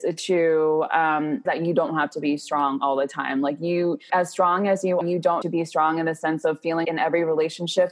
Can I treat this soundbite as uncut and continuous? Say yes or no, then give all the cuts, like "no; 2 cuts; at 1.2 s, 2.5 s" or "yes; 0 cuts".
no; 5 cuts; at 1.5 s, 4.1 s, 5.0 s, 5.4 s, 6.8 s